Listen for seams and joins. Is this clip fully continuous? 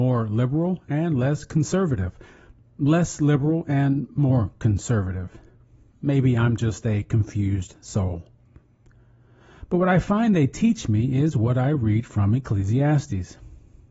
yes; 0 cuts

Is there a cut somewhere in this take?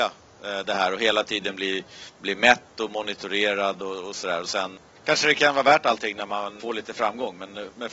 no; 0 cuts

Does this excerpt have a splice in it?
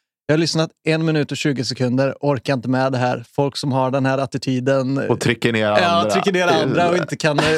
no; 0 cuts

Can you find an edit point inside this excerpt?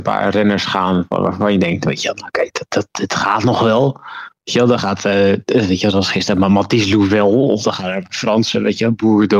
no; 0 cuts

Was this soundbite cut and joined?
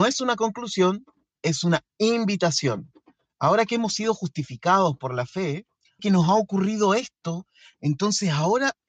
yes; 1 cut; at 6.0 s

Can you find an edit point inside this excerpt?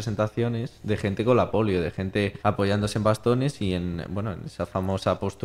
yes; 1 cut; at 2.4 s

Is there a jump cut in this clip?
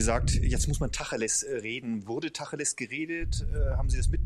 no; 0 cuts

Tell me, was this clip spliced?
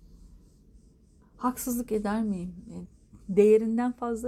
no; 0 cuts

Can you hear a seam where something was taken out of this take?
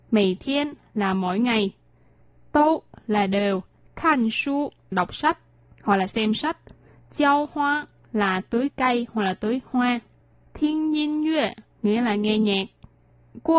yes; 1 cut; at 4.9 s

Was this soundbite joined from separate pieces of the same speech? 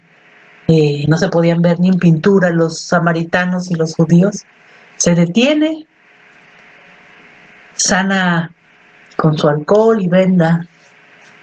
no; 0 cuts

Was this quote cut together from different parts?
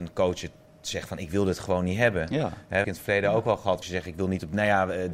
yes; 2 cuts; at 2.8 s, 3.8 s

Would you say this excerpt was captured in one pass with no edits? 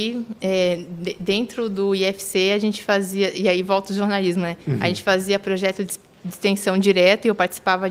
yes; 0 cuts

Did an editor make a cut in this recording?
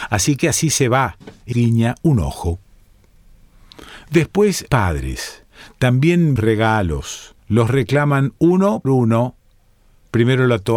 yes; 5 cuts; at 1.5 s, 4.7 s, 6.4 s, 7.4 s, 8.8 s

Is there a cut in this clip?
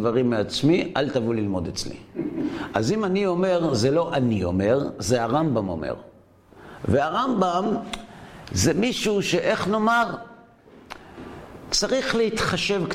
no; 0 cuts

